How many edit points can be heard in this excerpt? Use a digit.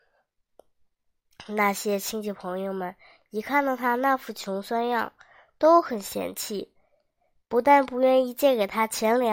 0